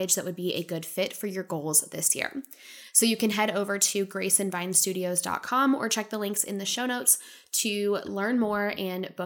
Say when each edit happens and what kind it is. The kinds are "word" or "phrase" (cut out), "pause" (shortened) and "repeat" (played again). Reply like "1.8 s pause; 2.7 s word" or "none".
none